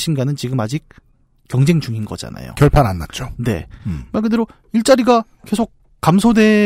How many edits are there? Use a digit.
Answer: 0